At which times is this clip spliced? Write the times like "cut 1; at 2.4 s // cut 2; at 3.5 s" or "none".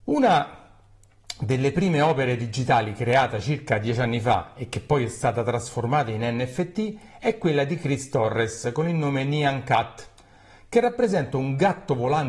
none